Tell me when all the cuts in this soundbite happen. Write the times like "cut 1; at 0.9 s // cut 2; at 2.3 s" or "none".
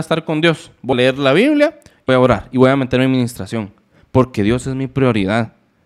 cut 1; at 0.9 s // cut 2; at 2.1 s

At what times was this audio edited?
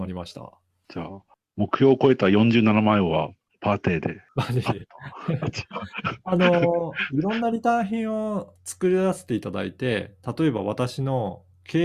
none

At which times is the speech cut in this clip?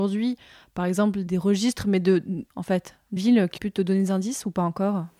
cut 1; at 1.3 s // cut 2; at 2.5 s // cut 3; at 3.2 s // cut 4; at 3.6 s

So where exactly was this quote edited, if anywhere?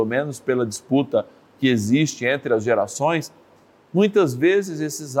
none

